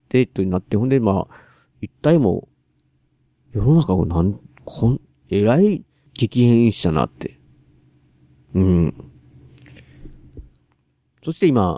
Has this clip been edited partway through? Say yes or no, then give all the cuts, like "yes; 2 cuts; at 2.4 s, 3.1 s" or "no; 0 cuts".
no; 0 cuts